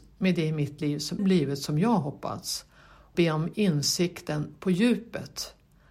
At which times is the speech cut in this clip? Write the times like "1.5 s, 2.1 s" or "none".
1.2 s, 3.1 s